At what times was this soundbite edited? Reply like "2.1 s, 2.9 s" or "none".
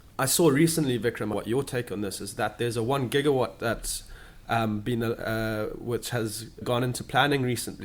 1.3 s, 6.6 s